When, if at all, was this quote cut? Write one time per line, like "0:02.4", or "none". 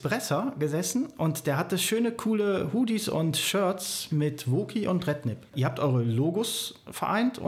none